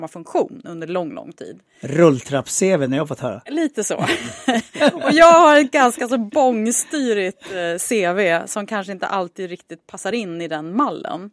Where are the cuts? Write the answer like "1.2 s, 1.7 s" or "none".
none